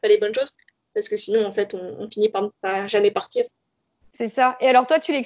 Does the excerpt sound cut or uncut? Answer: uncut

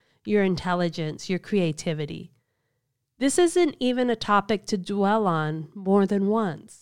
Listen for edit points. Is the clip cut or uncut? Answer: uncut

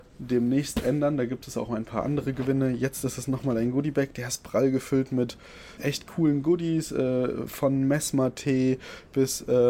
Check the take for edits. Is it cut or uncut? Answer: cut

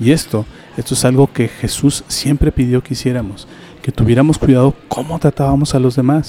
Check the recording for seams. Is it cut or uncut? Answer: uncut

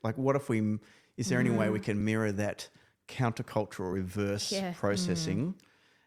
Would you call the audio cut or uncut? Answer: uncut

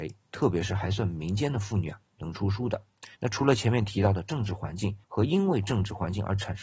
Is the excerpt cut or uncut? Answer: cut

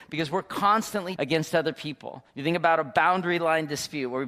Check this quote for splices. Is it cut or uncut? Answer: cut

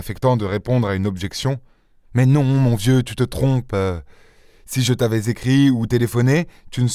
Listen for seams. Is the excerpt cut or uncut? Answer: uncut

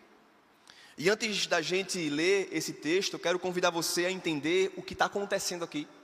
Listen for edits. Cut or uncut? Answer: uncut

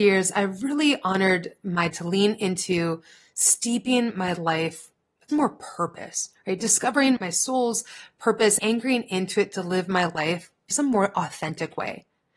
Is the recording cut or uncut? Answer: cut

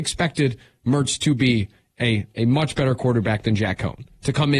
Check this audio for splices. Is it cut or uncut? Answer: uncut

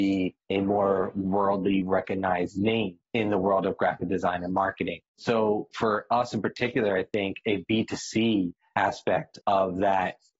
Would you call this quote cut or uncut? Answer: cut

